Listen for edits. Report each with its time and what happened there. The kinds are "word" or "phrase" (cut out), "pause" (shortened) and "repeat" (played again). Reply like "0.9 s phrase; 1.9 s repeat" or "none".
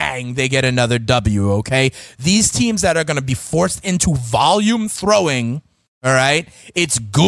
none